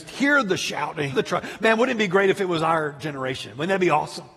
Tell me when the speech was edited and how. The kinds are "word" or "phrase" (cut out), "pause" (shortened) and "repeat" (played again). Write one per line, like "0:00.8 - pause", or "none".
0:01.1 - word